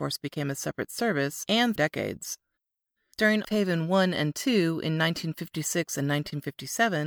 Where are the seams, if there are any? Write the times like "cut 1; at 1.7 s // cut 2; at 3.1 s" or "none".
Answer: cut 1; at 1.8 s // cut 2; at 3.4 s